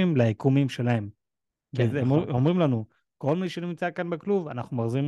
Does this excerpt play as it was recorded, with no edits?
yes; 0 cuts

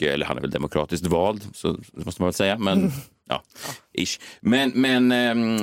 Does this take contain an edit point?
no; 0 cuts

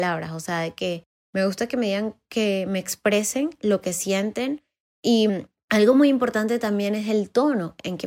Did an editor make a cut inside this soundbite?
no; 0 cuts

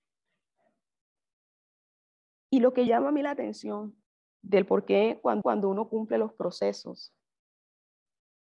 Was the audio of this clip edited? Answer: yes; 3 cuts; at 2.9 s, 4.0 s, 5.4 s

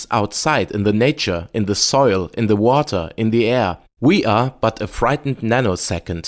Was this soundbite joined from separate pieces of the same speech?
no; 0 cuts

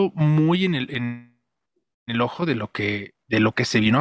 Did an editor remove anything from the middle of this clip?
no; 0 cuts

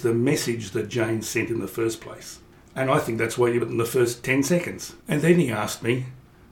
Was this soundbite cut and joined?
yes; 2 cuts; at 3.6 s, 5.0 s

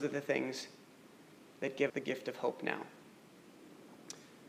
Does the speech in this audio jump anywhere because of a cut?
yes; 1 cut; at 1.9 s

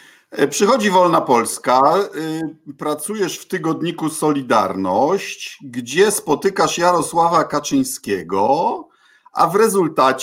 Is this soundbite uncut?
yes; 0 cuts

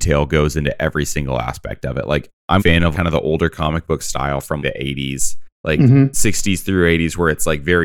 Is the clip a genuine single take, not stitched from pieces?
no; 4 cuts; at 2.6 s, 2.9 s, 4.6 s, 5.5 s

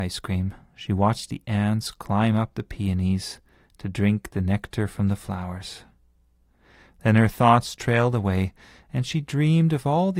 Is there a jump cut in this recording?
no; 0 cuts

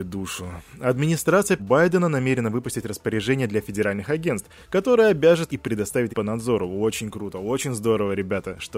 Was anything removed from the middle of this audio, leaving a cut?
yes; 3 cuts; at 1.6 s, 5.5 s, 6.1 s

